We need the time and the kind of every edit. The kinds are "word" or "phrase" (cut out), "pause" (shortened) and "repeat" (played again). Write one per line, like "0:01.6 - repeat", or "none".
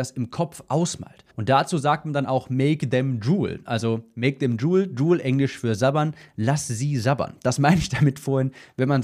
0:01.3 - pause